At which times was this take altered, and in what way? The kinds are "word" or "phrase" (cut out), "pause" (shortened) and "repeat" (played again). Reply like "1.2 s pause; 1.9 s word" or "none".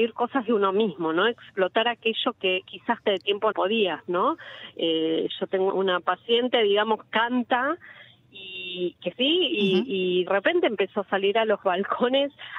3.1 s phrase; 3.5 s word; 5.7 s word; 7.1 s word; 9.1 s word; 10.3 s word